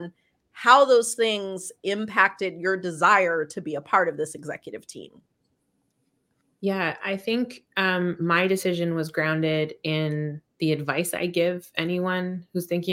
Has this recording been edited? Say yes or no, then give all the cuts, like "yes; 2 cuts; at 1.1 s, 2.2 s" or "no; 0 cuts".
no; 0 cuts